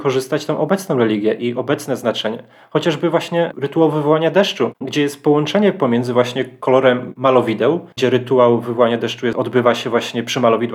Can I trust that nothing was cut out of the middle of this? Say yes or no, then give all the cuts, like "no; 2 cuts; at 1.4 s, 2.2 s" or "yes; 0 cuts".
no; 1 cut; at 7.9 s